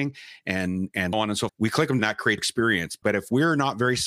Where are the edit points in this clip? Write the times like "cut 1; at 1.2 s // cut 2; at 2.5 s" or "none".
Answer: cut 1; at 1.1 s // cut 2; at 1.5 s // cut 3; at 2.0 s // cut 4; at 2.4 s // cut 5; at 3.0 s